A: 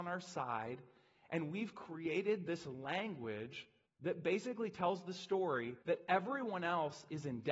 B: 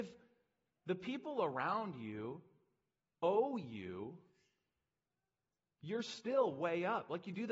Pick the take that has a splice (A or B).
A